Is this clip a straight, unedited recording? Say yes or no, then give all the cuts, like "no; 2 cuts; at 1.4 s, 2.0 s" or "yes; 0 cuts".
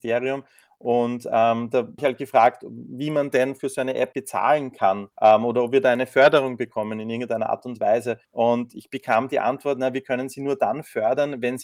no; 4 cuts; at 2.0 s, 4.1 s, 5.1 s, 8.2 s